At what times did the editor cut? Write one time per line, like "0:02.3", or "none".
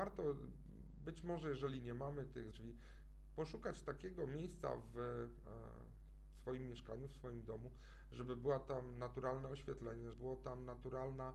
0:02.5
0:10.1